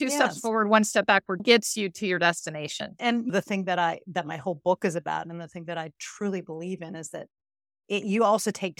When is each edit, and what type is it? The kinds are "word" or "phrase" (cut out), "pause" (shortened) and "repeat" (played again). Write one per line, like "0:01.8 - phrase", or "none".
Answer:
0:01.4 - word